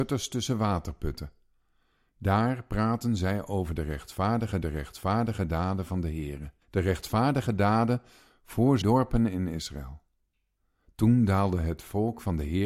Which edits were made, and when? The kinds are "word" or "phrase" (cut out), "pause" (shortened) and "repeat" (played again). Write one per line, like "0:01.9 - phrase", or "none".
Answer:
0:04.6 - repeat
0:06.6 - pause
0:08.8 - word